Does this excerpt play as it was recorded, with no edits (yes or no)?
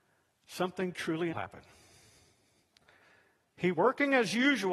no